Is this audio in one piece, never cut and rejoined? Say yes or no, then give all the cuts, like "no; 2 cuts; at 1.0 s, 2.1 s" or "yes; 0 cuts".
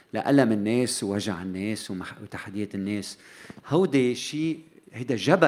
yes; 0 cuts